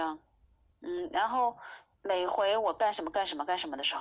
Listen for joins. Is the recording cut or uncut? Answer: cut